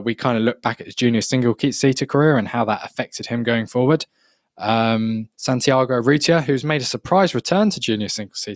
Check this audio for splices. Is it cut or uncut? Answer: cut